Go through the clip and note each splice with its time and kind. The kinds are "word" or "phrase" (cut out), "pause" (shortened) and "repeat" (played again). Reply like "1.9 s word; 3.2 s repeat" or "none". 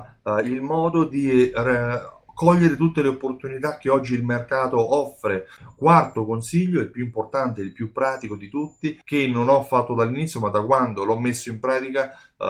2.3 s pause; 9.0 s pause